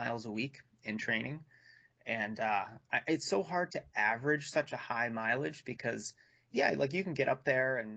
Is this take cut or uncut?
uncut